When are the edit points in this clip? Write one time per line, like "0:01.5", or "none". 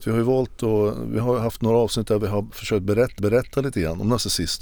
0:03.2